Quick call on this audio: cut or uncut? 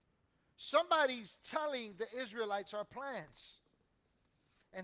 uncut